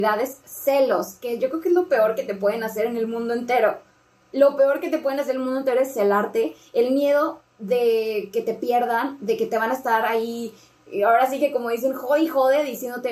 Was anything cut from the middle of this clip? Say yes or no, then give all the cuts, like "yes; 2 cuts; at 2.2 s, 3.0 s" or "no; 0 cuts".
no; 0 cuts